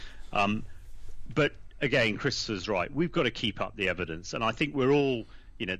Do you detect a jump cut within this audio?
no; 0 cuts

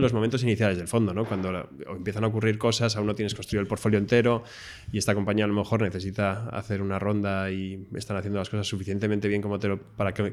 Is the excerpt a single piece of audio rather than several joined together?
yes; 0 cuts

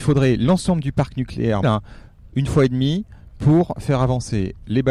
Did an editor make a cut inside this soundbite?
yes; 1 cut; at 1.6 s

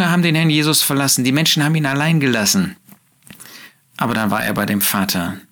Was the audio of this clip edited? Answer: no; 0 cuts

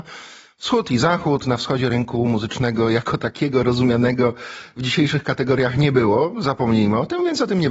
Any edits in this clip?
no; 0 cuts

